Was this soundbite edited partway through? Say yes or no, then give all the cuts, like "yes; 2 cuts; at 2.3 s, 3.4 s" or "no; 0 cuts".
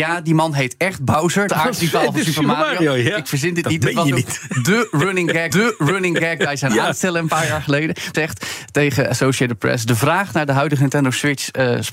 yes; 3 cuts; at 1.5 s, 5.5 s, 8.1 s